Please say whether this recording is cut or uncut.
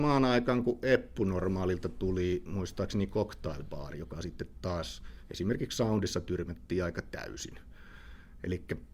uncut